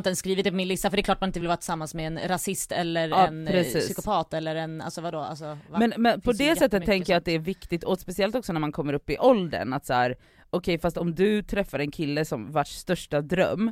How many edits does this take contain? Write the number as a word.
zero